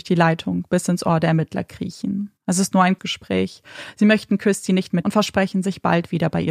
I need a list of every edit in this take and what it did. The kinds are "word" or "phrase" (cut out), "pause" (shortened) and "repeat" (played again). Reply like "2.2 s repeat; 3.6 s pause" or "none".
2.4 s pause; 3.0 s word; 5.0 s phrase